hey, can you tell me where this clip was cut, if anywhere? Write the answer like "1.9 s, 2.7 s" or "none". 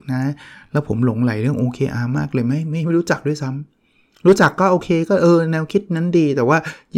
none

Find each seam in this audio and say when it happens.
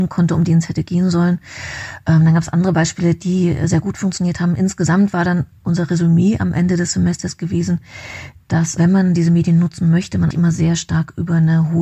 8.8 s, 10.3 s

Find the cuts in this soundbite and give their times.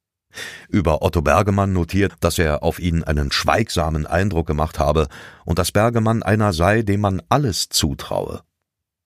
2.1 s, 3.3 s

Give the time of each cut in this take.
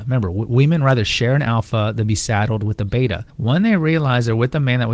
3.3 s

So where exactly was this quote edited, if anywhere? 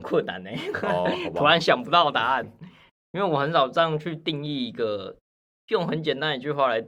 none

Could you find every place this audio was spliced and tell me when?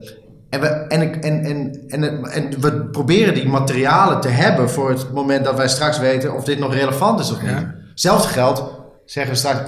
none

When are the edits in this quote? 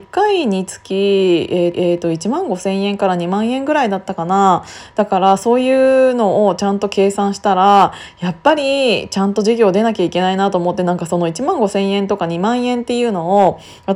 1.7 s

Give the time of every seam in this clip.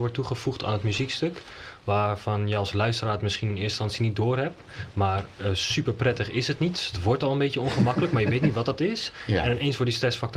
none

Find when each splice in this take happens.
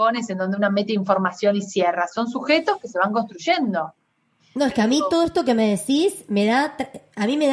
none

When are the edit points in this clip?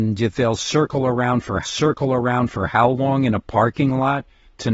1.6 s

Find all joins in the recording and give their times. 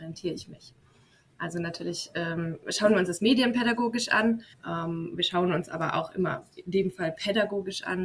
4.5 s

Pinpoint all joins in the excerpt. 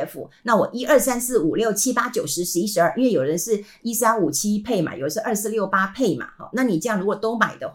none

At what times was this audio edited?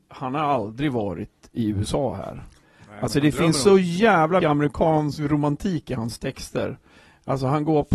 4.4 s

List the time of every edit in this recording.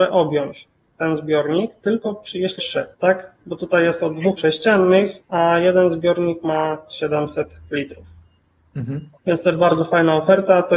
2.6 s, 2.9 s, 4.4 s, 5.2 s, 9.2 s

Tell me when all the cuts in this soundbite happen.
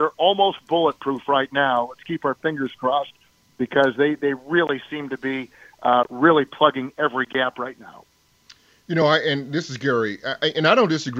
none

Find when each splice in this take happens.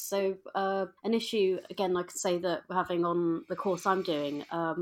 1.0 s

